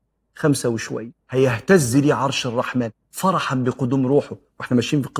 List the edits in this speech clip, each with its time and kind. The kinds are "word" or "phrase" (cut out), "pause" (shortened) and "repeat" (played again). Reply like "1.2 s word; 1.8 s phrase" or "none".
1.2 s pause